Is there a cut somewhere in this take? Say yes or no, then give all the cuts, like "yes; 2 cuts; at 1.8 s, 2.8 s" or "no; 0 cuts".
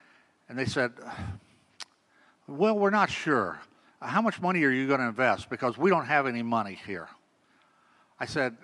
no; 0 cuts